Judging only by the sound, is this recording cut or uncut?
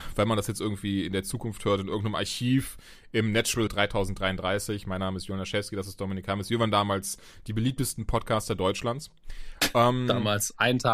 cut